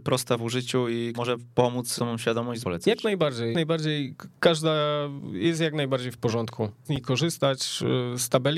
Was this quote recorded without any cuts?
no; 5 cuts; at 1.1 s, 2.0 s, 2.6 s, 3.5 s, 6.9 s

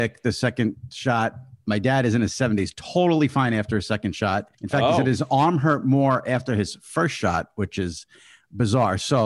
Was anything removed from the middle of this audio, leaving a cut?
yes; 1 cut; at 4.5 s

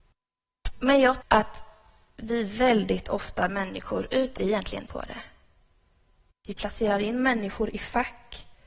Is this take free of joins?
no; 4 cuts; at 1.2 s, 3.5 s, 4.4 s, 4.9 s

